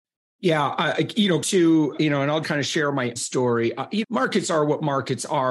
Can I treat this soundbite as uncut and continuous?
no; 5 cuts; at 1.4 s, 2.0 s, 2.4 s, 3.2 s, 4.0 s

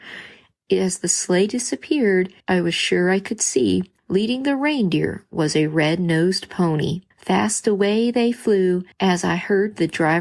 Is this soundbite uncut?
no; 4 cuts; at 2.4 s, 4.0 s, 7.1 s, 8.9 s

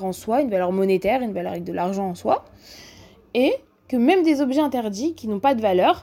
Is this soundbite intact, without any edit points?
yes; 0 cuts

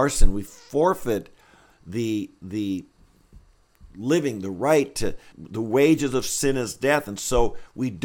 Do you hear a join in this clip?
yes; 1 cut; at 5.3 s

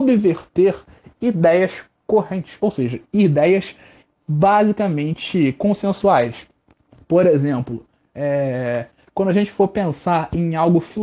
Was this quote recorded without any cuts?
yes; 0 cuts

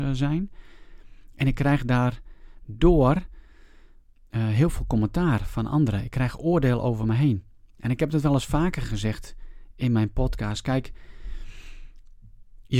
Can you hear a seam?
no; 0 cuts

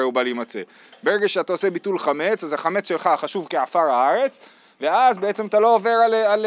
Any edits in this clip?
no; 0 cuts

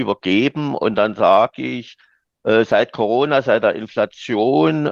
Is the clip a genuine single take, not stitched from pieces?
yes; 0 cuts

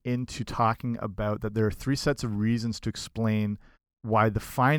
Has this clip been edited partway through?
yes; 1 cut; at 3.7 s

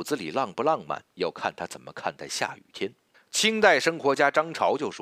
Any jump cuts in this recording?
yes; 2 cuts; at 1.1 s, 3.1 s

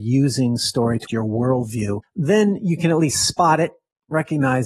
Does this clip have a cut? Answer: yes; 2 cuts; at 1.1 s, 2.0 s

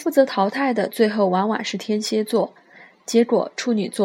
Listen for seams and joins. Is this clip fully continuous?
yes; 0 cuts

